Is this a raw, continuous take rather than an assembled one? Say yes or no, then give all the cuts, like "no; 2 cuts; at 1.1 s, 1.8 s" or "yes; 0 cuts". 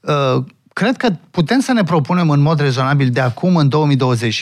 yes; 0 cuts